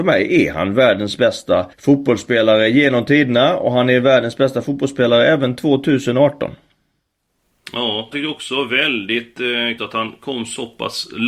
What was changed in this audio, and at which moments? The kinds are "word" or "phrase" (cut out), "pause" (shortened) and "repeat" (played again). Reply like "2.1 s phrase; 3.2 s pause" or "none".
1.7 s pause; 8.1 s word; 9.8 s word